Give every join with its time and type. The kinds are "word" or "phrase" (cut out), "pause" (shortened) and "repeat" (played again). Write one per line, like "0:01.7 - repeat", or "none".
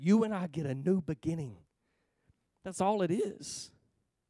none